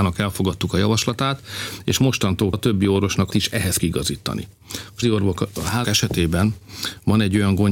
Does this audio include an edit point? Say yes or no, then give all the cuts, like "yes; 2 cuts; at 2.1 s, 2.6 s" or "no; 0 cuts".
yes; 5 cuts; at 2.5 s, 3.3 s, 3.8 s, 5.0 s, 5.8 s